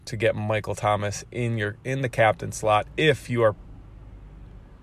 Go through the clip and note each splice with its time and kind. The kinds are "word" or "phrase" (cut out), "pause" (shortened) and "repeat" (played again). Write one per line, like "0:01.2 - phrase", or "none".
none